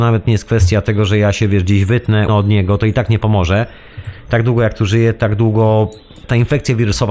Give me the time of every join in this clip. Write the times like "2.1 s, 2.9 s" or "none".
2.3 s